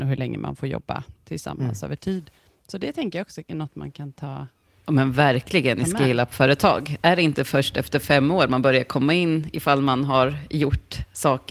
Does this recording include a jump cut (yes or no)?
yes